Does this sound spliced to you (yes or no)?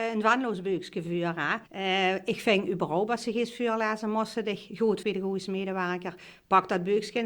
yes